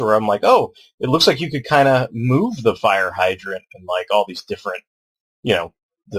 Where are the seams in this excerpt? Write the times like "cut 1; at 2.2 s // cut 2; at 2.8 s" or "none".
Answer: none